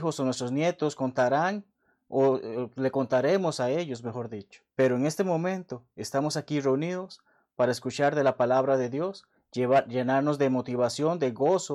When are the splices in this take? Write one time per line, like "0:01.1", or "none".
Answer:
0:04.7